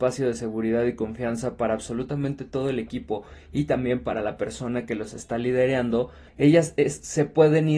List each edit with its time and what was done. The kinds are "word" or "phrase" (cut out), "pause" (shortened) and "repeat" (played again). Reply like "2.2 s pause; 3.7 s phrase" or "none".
6.3 s pause